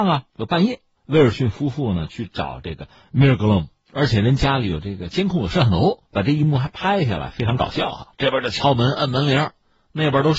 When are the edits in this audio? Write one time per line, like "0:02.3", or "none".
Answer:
0:06.1
0:08.1